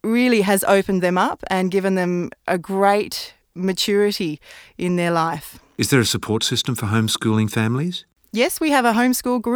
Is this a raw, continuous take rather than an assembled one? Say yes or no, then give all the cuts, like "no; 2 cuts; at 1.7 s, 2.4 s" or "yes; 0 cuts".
yes; 0 cuts